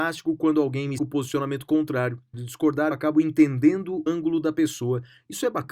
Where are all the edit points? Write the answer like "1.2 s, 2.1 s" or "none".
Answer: 1.0 s, 2.3 s, 2.9 s, 4.1 s